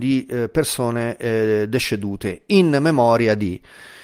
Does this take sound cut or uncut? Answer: uncut